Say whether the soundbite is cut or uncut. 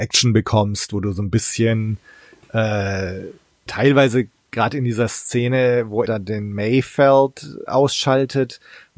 cut